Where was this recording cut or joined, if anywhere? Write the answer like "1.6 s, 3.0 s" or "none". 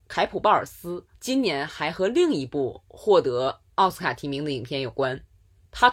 1.1 s